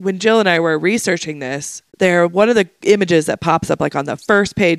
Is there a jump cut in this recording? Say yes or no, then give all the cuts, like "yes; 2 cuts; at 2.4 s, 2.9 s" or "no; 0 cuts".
yes; 1 cut; at 1.9 s